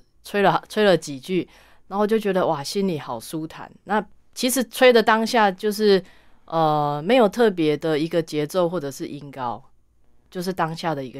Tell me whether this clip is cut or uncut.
uncut